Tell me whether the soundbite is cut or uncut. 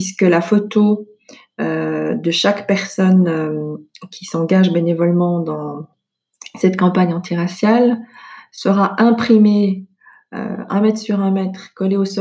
uncut